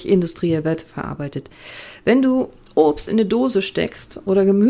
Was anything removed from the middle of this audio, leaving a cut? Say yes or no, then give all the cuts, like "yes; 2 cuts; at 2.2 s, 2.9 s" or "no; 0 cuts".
no; 0 cuts